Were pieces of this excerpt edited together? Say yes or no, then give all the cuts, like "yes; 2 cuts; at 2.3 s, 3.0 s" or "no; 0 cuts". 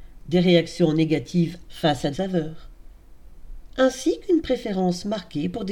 yes; 2 cuts; at 1.7 s, 2.1 s